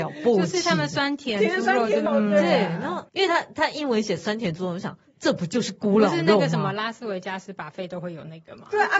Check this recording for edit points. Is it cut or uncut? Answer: cut